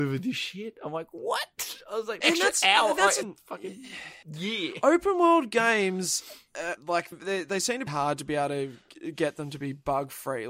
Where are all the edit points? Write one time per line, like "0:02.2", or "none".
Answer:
0:02.2
0:03.2
0:04.2
0:06.8
0:07.1
0:07.9

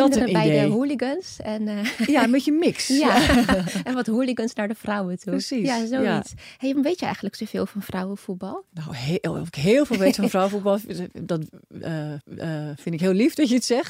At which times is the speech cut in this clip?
0:06.7
0:08.7
0:12.2

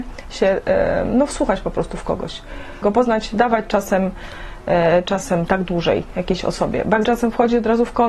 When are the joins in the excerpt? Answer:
0:02.8
0:05.5
0:07.0

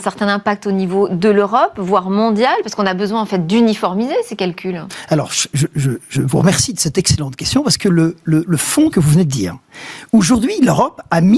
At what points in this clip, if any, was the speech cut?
0:08.9

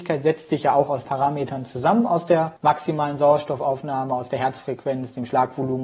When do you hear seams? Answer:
0:01.0
0:02.6

